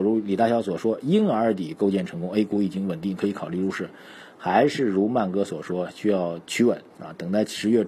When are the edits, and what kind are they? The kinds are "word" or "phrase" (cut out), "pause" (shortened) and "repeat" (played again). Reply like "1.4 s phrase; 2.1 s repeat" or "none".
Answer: 6.4 s pause; 6.9 s pause